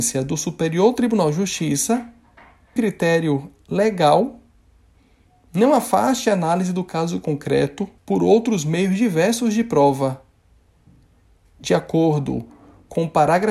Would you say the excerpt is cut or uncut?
cut